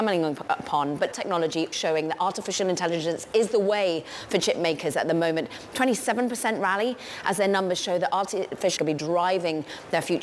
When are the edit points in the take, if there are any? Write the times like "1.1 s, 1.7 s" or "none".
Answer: 1.1 s, 1.7 s, 8.8 s